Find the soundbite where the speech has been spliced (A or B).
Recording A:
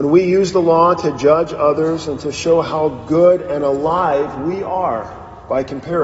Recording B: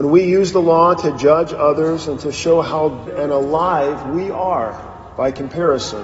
B